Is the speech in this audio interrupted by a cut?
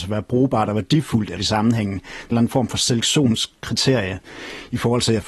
yes; 2 cuts; at 1.4 s, 2.3 s

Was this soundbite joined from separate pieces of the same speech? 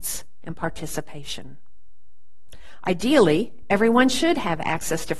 no; 0 cuts

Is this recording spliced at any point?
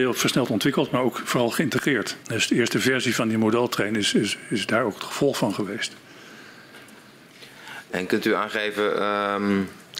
yes; 1 cut; at 2.2 s

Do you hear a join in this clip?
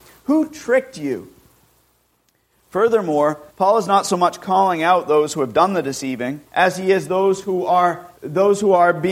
yes; 3 cuts; at 3.5 s, 6.5 s, 8.2 s

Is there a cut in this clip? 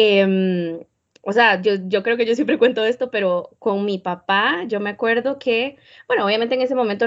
no; 0 cuts

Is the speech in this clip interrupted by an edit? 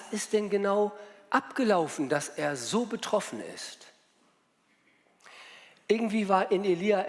no; 0 cuts

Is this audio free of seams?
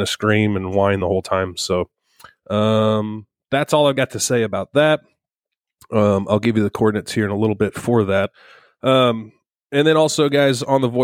yes; 0 cuts

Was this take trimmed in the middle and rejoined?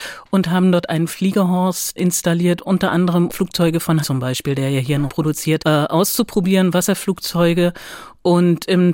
yes; 5 cuts; at 2.0 s, 3.3 s, 4.0 s, 5.1 s, 5.6 s

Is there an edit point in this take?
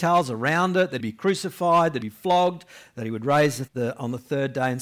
yes; 3 cuts; at 1.0 s, 2.0 s, 3.7 s

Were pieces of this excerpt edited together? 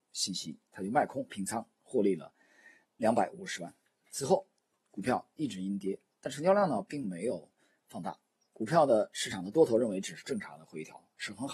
yes; 1 cut; at 2.8 s

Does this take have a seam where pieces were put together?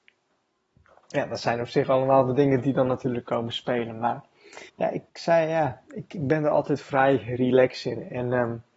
yes; 2 cuts; at 4.7 s, 5.1 s

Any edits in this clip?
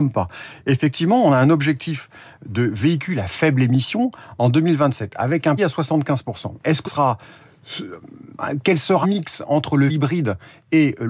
yes; 4 cuts; at 5.6 s, 6.8 s, 9.0 s, 9.9 s

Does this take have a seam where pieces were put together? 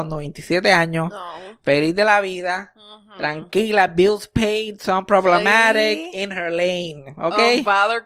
no; 0 cuts

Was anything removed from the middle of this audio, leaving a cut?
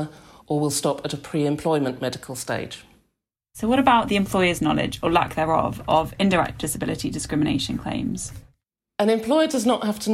no; 0 cuts

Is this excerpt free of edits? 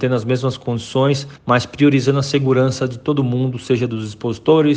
no; 1 cut; at 1.4 s

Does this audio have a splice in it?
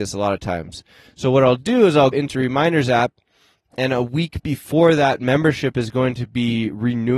yes; 1 cut; at 2.1 s

